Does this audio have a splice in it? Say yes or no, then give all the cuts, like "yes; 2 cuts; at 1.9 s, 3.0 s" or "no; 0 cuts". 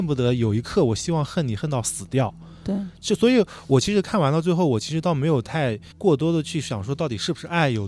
yes; 1 cut; at 5.9 s